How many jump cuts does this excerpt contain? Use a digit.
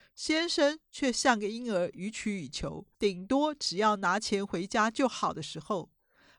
1